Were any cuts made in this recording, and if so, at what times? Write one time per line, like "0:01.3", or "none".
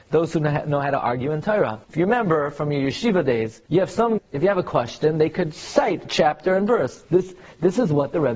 0:01.8
0:03.7
0:04.2